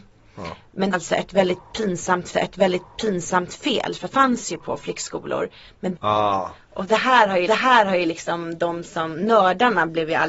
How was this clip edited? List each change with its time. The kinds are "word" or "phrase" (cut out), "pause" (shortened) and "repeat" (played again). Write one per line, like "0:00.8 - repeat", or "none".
0:00.9 - phrase
0:02.3 - repeat
0:04.1 - word
0:06.0 - phrase
0:07.5 - repeat